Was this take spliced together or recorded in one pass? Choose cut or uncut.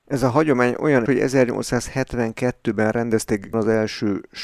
cut